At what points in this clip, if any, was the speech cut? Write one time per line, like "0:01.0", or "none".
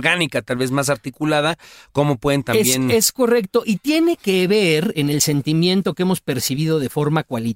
none